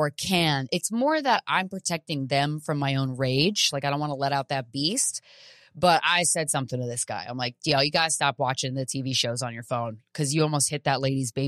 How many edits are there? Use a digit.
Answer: 0